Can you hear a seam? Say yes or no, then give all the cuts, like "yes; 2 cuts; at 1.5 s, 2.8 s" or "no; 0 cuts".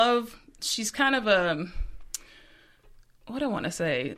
no; 0 cuts